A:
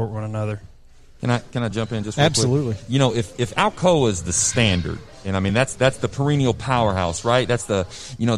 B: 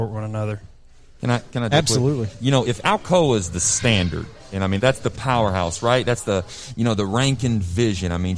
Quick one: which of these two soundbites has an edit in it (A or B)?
B